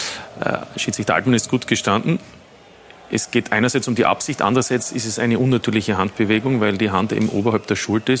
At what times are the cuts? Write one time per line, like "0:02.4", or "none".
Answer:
none

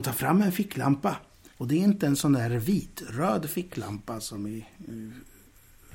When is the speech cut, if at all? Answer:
0:01.5

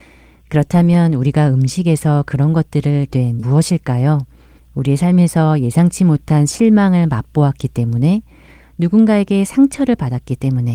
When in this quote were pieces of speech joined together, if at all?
0:03.1
0:03.4
0:04.6

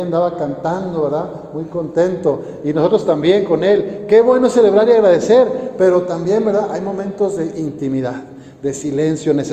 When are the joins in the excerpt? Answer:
none

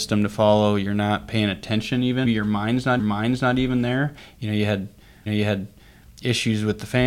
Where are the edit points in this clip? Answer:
0:02.2
0:03.0
0:05.3

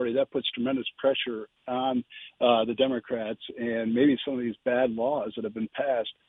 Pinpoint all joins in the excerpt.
none

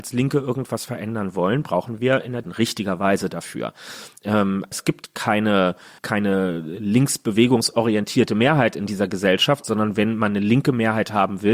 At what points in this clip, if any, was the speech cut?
0:02.4
0:04.7
0:06.0

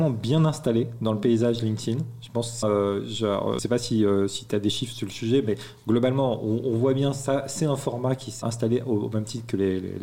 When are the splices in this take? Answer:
0:02.6
0:03.6
0:08.4

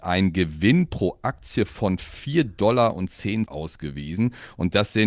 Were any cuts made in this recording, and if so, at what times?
0:03.5

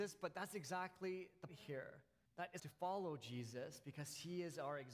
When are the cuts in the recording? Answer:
0:01.5
0:02.3
0:02.6

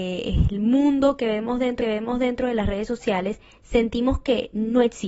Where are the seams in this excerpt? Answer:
0:01.8

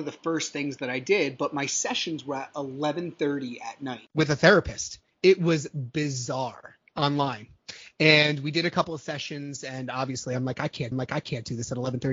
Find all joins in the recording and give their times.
0:10.9

